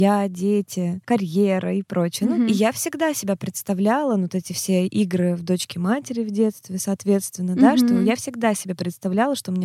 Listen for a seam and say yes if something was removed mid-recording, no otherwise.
no